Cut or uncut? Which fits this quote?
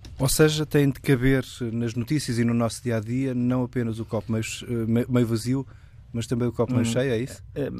uncut